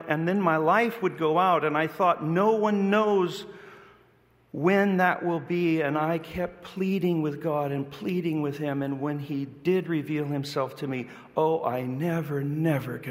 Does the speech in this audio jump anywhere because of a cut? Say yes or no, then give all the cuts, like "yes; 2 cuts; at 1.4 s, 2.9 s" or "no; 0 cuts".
no; 0 cuts